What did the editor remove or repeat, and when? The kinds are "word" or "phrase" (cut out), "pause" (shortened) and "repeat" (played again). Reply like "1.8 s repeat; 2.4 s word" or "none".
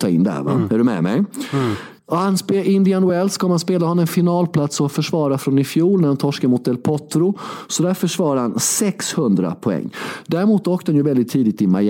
none

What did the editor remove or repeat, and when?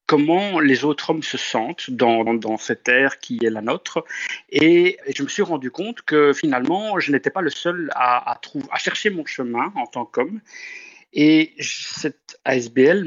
2.3 s word; 5.0 s word

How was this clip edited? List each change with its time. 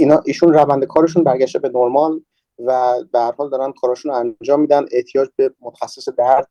none

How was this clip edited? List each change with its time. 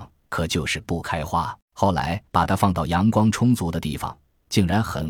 1.6 s pause; 2.3 s pause

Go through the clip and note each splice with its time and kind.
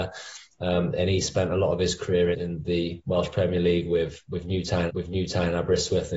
2.3 s word; 4.9 s repeat

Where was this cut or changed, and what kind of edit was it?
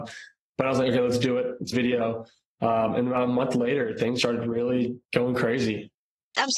1.7 s phrase; 4.2 s word; 5.0 s pause

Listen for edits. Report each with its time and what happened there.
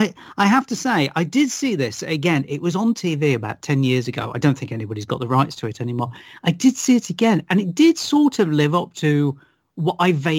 none

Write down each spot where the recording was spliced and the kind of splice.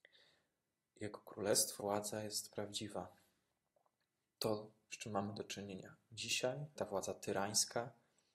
1.8 s word; 6.8 s word

